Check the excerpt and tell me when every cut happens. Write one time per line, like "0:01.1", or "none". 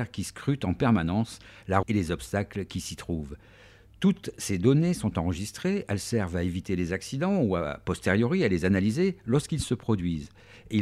0:01.8